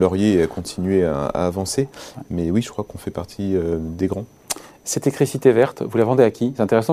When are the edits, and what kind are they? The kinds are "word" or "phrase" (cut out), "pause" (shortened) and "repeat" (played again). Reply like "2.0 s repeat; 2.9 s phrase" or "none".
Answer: none